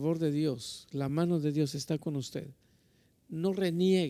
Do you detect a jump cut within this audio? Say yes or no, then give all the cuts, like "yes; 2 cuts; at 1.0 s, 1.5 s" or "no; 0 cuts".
no; 0 cuts